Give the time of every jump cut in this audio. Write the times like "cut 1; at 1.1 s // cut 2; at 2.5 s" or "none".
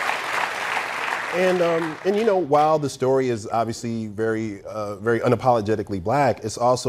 none